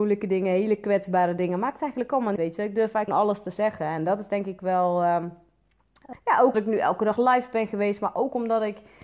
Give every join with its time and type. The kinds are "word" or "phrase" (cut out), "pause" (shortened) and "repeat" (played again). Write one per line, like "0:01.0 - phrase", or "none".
0:02.4 - word
0:03.1 - word
0:06.1 - word
0:06.5 - word